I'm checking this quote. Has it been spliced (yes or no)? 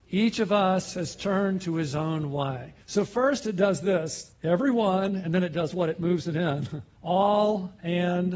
yes